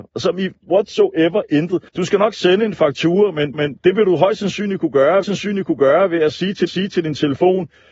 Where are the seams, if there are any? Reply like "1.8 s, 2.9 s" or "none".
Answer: 1.9 s, 3.5 s, 5.2 s, 6.7 s